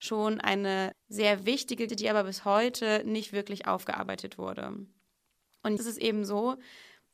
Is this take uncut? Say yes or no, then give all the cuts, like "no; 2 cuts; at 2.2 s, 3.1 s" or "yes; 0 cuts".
no; 3 cuts; at 0.9 s, 1.9 s, 5.8 s